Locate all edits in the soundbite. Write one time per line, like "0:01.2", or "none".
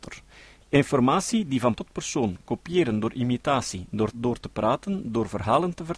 0:01.8
0:04.1